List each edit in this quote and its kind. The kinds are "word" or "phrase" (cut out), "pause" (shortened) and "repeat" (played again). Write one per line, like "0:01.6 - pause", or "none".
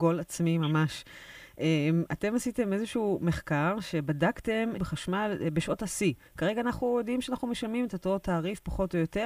0:04.7 - phrase
0:06.3 - pause